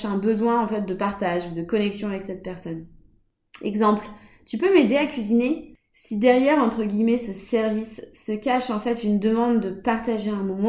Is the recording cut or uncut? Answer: uncut